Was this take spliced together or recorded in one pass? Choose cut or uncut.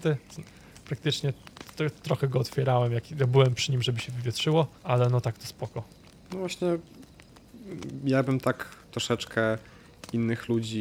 cut